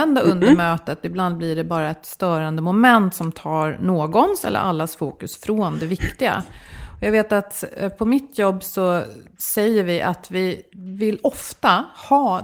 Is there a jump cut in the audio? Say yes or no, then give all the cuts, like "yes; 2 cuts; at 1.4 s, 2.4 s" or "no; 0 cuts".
no; 0 cuts